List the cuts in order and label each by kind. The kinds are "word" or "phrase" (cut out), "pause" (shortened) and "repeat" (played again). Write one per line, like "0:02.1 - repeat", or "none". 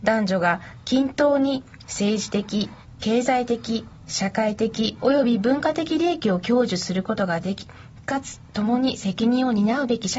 none

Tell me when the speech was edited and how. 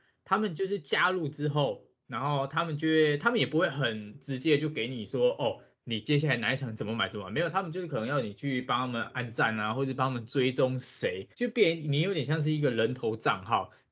0:11.3 - pause

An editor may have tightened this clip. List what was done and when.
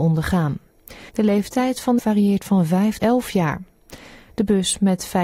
0:01.1 - pause
0:02.0 - phrase
0:03.0 - word

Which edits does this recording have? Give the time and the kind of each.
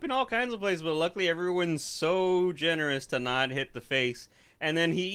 none

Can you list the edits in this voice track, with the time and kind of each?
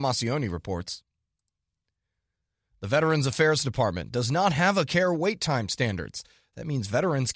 0:04.9 - word

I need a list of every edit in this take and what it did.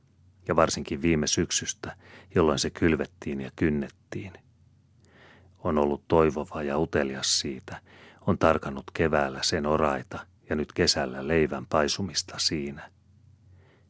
none

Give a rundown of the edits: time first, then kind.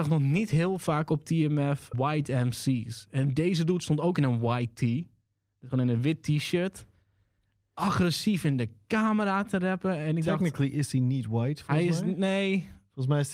0:01.9 - word

